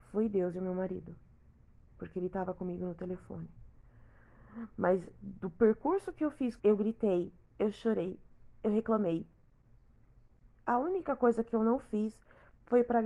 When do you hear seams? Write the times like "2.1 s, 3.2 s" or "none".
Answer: 6.6 s

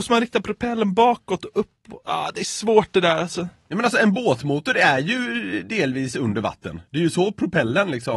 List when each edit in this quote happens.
none

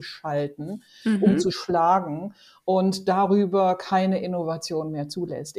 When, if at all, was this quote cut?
none

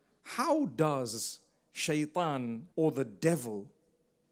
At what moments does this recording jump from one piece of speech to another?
2.7 s

